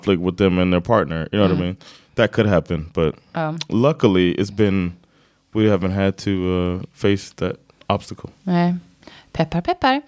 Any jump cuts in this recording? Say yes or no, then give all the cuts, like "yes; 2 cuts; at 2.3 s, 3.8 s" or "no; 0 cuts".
no; 0 cuts